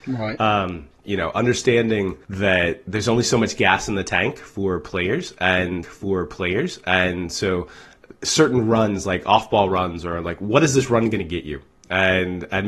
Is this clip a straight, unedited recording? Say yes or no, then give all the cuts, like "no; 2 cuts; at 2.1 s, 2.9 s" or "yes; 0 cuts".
no; 3 cuts; at 1.0 s, 2.2 s, 5.8 s